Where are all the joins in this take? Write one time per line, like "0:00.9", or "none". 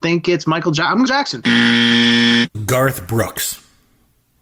0:01.1
0:02.5